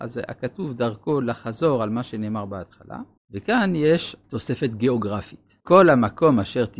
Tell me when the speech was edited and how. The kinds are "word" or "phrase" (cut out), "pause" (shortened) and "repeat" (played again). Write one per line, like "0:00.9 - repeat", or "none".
0:03.2 - pause
0:04.2 - pause
0:05.6 - pause

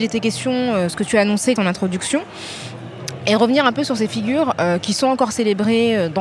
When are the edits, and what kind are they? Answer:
0:01.6 - word

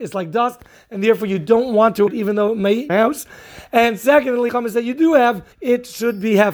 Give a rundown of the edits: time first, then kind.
0:02.1 - word
0:02.9 - phrase
0:04.5 - word
0:05.5 - pause

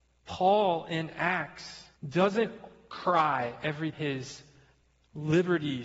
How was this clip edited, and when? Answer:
0:02.0 - pause
0:03.9 - word

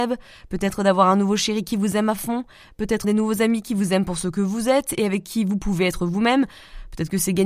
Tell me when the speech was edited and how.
0:03.0 - word

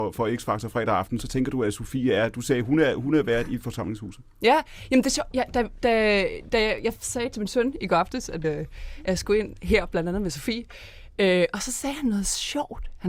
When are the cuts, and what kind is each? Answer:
0:08.4 - word

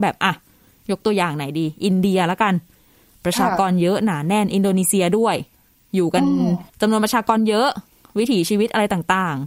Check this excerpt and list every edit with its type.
0:06.7 - pause

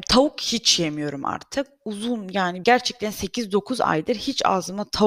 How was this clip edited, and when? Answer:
0:02.6 - word

